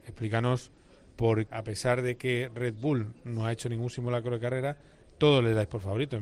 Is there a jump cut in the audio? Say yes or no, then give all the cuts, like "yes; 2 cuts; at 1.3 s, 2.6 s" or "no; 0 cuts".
yes; 1 cut; at 1.5 s